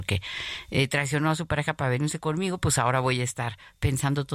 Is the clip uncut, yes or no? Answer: yes